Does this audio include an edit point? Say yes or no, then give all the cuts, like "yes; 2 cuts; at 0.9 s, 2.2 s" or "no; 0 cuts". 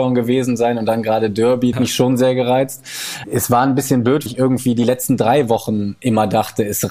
yes; 2 cuts; at 1.7 s, 4.3 s